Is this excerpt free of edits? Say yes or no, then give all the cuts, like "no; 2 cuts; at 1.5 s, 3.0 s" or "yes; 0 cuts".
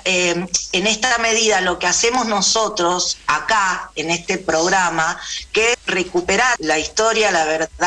no; 3 cuts; at 3.2 s, 5.7 s, 6.6 s